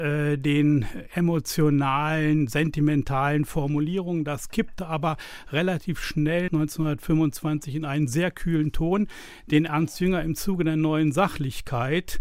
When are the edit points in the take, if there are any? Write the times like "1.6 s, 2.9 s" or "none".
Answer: 6.5 s